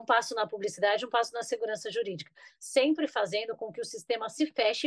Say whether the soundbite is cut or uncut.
uncut